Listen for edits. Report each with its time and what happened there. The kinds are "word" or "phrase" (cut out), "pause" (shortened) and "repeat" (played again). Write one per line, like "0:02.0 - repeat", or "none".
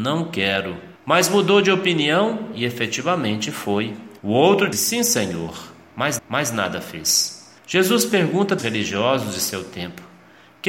0:01.0 - pause
0:04.2 - pause
0:04.7 - word
0:06.2 - repeat
0:07.6 - pause
0:08.6 - phrase